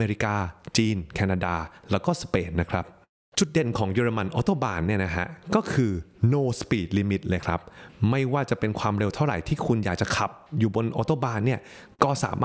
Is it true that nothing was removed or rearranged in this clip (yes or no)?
yes